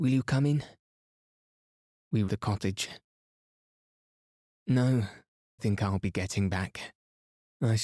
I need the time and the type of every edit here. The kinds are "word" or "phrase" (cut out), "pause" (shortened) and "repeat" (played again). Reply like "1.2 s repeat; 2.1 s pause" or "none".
2.3 s word; 5.6 s word

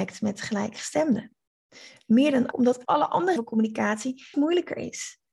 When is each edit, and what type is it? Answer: 2.5 s word; 2.8 s word; 3.4 s word; 4.3 s word

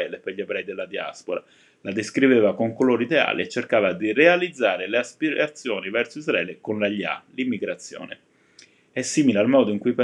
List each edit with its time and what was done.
none

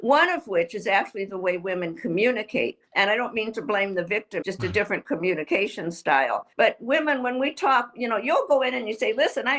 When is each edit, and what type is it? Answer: 2.9 s pause; 4.4 s phrase; 6.5 s pause

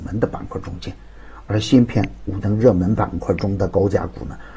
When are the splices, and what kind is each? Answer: 2.4 s word

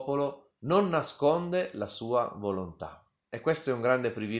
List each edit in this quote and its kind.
none

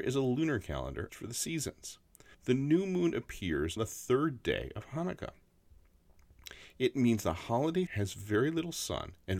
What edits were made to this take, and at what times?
1.1 s word; 3.8 s word; 7.9 s word

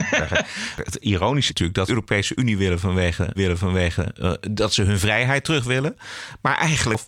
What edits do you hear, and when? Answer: 1.5 s word; 1.9 s phrase; 3.4 s repeat

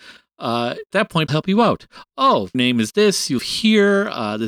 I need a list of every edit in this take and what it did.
0.9 s word; 1.3 s word; 2.5 s word; 3.4 s word

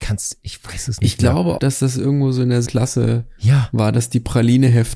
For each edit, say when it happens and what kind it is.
1.6 s word; 2.6 s word

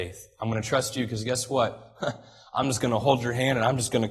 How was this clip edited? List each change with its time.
none

